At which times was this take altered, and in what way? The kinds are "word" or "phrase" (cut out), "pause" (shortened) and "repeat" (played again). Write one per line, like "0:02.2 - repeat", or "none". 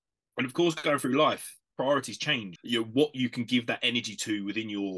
0:02.6 - word